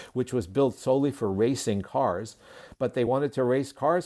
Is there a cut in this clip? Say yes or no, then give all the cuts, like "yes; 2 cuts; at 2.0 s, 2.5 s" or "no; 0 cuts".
no; 0 cuts